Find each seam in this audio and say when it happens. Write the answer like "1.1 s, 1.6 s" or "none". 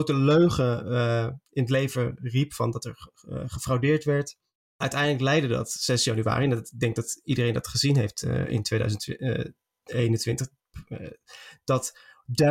none